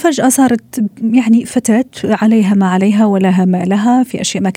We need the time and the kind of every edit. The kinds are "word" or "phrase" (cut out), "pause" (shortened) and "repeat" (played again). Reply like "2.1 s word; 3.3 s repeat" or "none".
none